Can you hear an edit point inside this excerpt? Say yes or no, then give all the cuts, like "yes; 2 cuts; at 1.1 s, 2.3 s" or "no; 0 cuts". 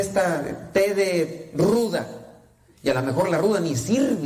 no; 0 cuts